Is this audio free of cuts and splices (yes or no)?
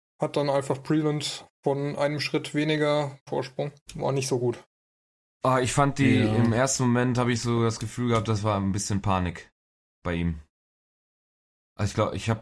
no